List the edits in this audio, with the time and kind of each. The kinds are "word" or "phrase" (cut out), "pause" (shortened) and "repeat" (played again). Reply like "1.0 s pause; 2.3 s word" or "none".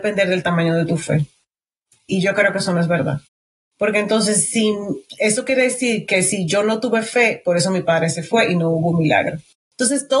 none